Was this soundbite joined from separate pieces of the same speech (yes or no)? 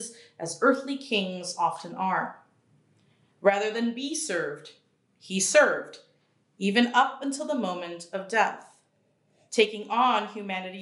no